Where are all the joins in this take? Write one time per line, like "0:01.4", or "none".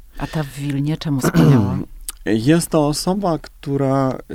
0:01.2